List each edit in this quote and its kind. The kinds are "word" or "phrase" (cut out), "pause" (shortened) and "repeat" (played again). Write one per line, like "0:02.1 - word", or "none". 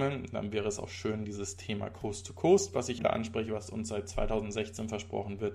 0:01.2 - word
0:03.0 - phrase